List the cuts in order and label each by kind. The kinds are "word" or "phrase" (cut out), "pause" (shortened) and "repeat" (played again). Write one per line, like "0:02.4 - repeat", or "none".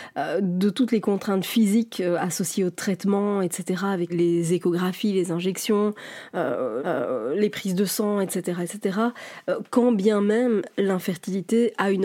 0:04.1 - word
0:06.8 - repeat